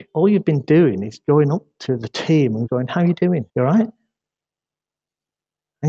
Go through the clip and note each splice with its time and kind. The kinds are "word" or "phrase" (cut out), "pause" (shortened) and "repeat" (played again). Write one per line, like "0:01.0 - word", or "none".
0:02.7 - word
0:03.5 - pause